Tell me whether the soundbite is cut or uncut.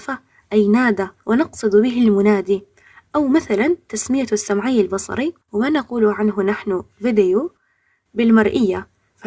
cut